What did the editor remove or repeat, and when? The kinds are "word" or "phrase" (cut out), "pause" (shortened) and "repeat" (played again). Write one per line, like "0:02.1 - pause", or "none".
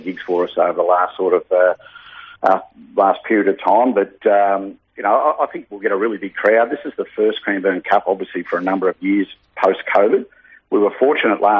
0:02.4 - pause